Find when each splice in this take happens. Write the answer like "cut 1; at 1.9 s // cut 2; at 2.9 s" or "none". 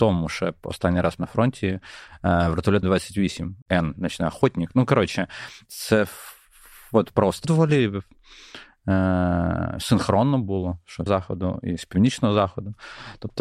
cut 1; at 1.2 s // cut 2; at 2.8 s // cut 3; at 3.6 s // cut 4; at 7.4 s // cut 5; at 11.1 s